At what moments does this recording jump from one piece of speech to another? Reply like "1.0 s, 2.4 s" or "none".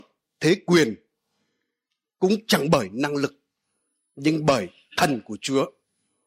none